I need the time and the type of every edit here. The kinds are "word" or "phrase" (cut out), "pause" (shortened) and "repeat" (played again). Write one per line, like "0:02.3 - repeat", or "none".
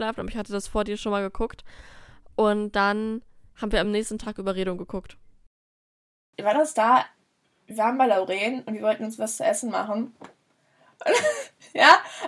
none